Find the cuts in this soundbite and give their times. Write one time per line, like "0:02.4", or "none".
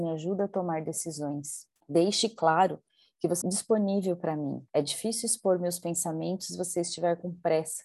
0:01.8
0:03.4
0:04.7